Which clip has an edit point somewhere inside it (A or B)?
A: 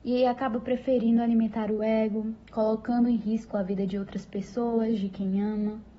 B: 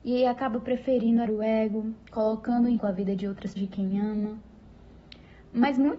B